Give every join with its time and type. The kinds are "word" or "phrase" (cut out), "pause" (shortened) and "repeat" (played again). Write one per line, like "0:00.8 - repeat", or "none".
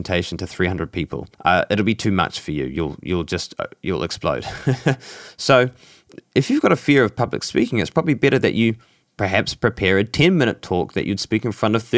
0:01.3 - pause
0:09.0 - pause